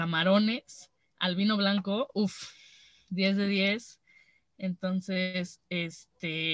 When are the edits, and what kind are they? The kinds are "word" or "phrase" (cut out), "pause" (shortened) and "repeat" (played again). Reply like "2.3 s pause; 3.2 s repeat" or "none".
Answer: none